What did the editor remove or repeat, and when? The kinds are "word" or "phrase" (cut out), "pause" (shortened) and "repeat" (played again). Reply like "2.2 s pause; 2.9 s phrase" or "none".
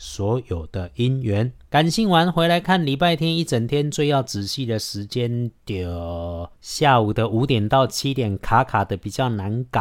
1.6 s pause; 6.5 s pause